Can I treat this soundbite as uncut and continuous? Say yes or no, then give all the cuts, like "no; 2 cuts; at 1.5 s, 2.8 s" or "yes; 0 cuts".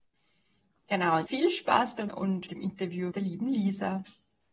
no; 4 cuts; at 1.3 s, 2.1 s, 2.5 s, 3.1 s